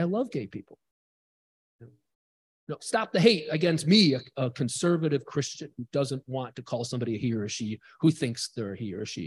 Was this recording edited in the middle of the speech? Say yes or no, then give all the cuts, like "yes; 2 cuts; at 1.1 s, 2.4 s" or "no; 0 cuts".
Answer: no; 0 cuts